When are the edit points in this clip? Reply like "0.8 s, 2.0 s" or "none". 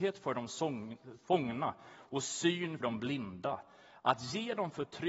2.8 s

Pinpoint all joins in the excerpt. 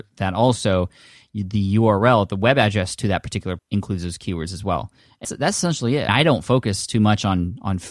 3.6 s, 5.2 s, 6.1 s

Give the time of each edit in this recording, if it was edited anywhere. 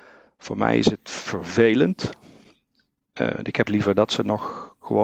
3.7 s

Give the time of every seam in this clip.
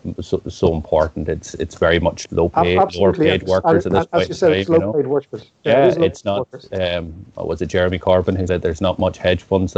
2.3 s, 8.5 s

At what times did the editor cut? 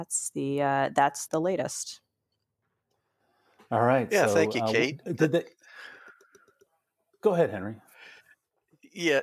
1.3 s

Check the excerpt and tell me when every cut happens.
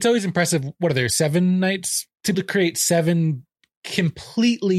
2.3 s

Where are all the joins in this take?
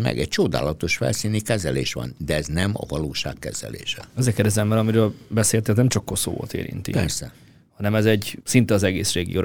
4.1 s, 8.4 s

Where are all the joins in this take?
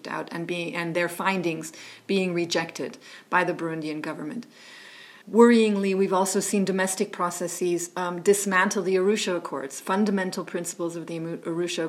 5.2 s

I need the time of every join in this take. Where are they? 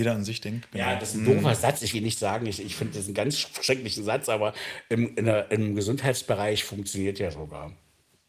1.9 s

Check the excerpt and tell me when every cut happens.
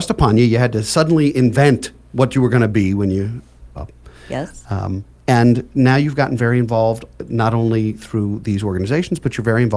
3.7 s, 5.1 s

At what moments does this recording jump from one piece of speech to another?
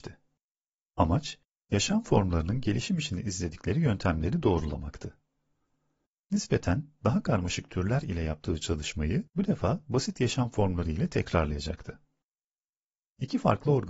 9.3 s

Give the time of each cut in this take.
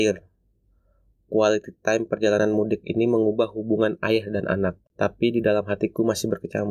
4.9 s

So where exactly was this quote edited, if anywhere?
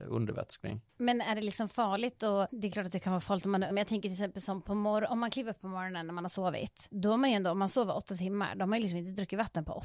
3.7 s

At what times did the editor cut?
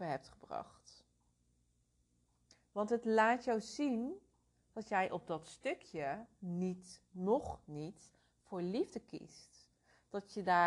none

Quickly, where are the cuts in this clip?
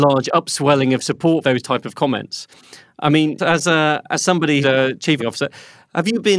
1.4 s, 3.4 s, 4.6 s, 5.2 s

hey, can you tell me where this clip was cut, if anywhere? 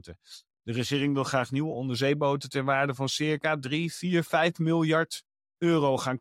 none

